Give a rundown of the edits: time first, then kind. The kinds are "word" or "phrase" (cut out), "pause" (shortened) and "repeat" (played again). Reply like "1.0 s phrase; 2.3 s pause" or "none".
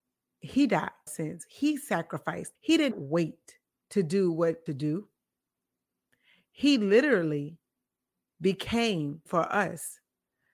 1.1 s phrase; 2.5 s pause; 2.9 s word; 3.7 s pause; 4.7 s phrase; 9.3 s word